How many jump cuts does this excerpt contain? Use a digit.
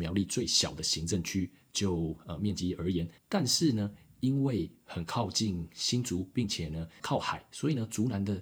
2